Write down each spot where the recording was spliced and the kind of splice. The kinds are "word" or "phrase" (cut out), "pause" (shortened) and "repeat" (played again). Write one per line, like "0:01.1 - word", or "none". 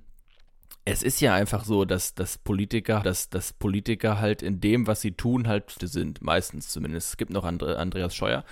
0:03.0 - repeat
0:05.8 - word